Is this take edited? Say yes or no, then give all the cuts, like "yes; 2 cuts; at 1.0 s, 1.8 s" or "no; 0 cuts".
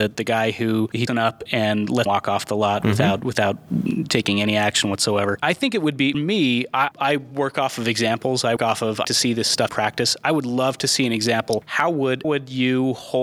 yes; 9 cuts; at 1.1 s, 1.5 s, 2.1 s, 6.1 s, 6.9 s, 8.6 s, 9.0 s, 9.7 s, 12.2 s